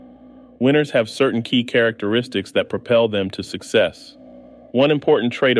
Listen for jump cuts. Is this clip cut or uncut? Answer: uncut